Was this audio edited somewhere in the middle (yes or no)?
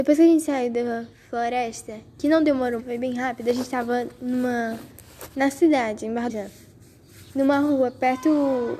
yes